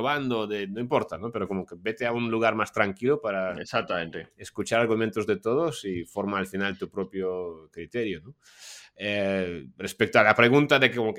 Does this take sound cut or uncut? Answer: uncut